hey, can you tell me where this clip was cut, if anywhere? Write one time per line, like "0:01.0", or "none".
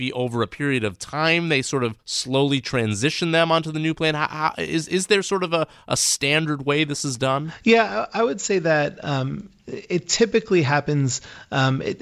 0:02.0